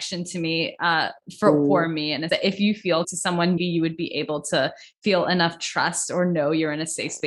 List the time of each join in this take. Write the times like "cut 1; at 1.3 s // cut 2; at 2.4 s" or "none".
cut 1; at 2.3 s // cut 2; at 3.0 s // cut 3; at 3.6 s